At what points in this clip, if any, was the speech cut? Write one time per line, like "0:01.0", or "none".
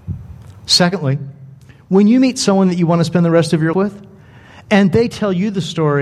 0:03.7